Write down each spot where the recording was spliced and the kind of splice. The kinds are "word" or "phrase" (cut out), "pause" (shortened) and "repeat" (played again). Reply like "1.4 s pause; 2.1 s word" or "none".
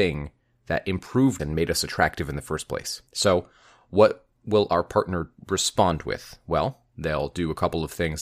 1.4 s word; 3.1 s pause